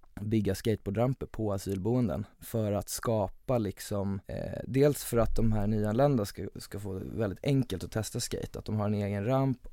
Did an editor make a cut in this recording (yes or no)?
yes